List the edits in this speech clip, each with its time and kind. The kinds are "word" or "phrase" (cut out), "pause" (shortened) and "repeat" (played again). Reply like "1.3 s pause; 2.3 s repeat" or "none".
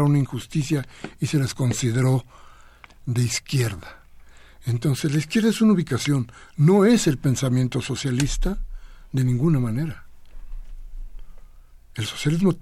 none

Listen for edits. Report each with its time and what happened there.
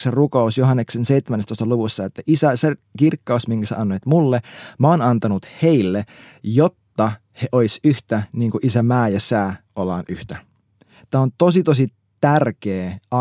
none

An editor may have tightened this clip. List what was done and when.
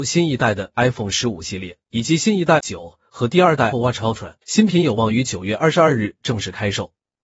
1.8 s pause; 2.6 s phrase; 3.7 s word; 4.4 s pause

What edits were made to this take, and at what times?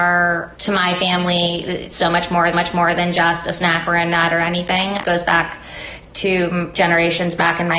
2.5 s repeat

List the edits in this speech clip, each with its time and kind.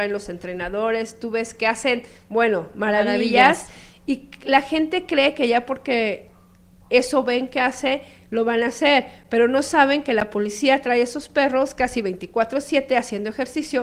none

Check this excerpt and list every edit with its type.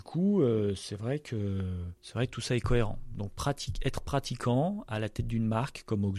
2.0 s pause

